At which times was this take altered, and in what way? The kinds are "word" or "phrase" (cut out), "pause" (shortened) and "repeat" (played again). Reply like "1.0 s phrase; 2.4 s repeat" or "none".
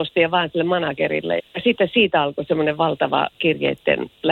1.4 s word